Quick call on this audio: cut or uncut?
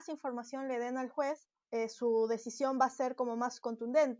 uncut